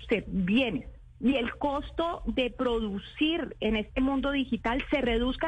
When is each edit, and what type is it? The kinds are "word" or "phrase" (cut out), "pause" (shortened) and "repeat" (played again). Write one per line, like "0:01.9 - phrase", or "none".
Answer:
0:01.1 - pause